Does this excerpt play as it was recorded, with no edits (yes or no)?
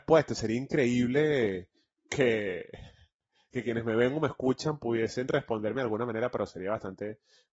yes